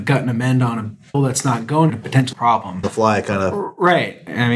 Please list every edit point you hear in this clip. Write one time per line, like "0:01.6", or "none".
0:01.1
0:01.9
0:02.3
0:02.8